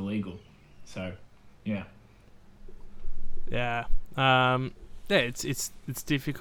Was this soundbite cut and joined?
yes; 1 cut; at 1.5 s

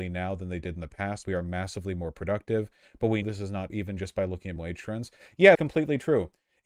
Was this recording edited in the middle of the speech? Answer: yes; 5 cuts; at 1.2 s, 3.2 s, 3.7 s, 4.6 s, 5.5 s

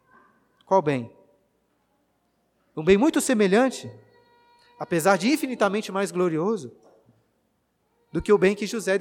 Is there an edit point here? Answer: no; 0 cuts

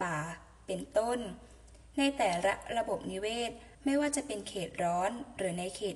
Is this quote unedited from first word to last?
no; 1 cut; at 3.7 s

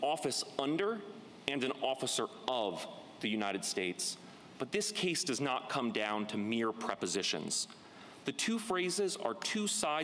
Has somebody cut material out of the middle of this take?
no; 0 cuts

